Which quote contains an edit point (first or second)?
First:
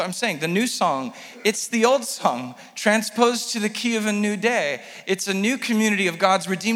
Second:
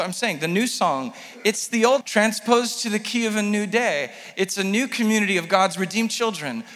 second